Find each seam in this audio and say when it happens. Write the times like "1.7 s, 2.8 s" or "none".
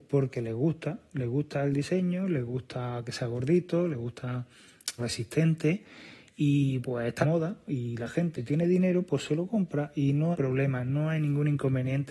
5.0 s, 6.8 s, 7.2 s, 8.4 s, 10.3 s